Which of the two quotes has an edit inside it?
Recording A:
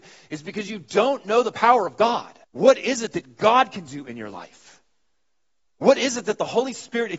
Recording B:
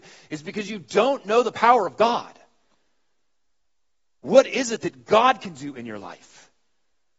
A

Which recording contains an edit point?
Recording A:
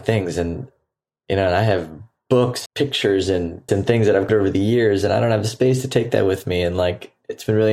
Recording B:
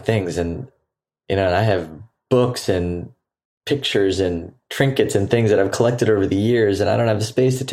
A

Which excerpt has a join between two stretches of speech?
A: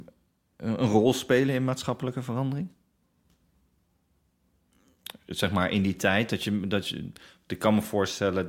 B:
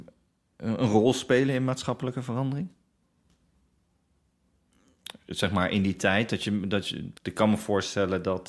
B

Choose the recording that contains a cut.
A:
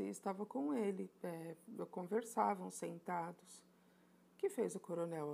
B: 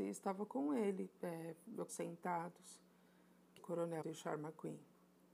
B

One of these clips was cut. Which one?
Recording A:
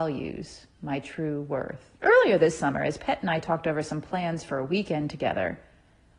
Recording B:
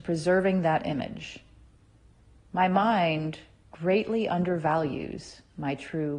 A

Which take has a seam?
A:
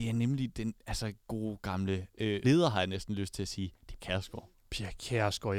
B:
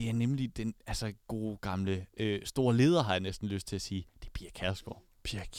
A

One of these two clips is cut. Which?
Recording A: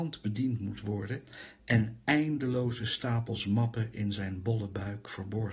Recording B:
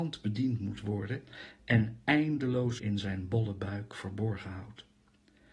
B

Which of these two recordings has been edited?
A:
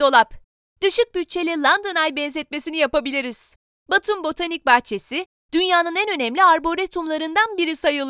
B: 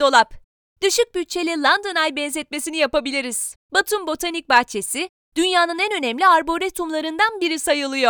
B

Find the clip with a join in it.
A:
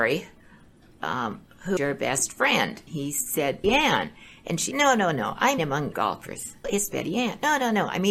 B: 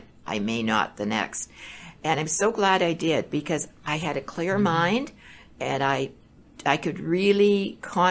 A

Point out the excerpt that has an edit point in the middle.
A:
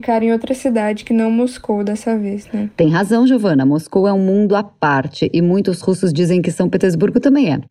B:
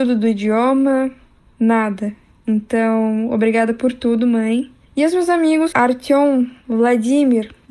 B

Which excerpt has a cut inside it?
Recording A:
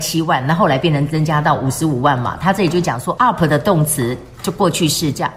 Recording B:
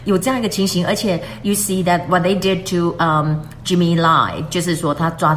A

